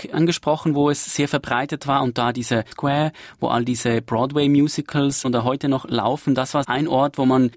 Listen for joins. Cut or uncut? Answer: cut